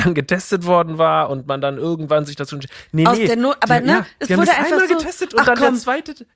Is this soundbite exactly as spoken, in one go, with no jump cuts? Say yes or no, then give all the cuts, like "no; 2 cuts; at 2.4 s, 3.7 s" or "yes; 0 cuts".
yes; 0 cuts